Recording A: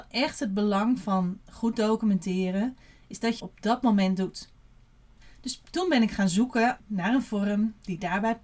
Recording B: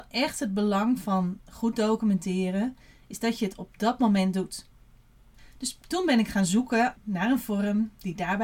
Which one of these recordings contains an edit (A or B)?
A